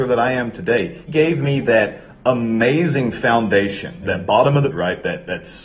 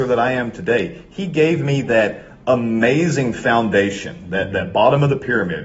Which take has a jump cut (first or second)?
first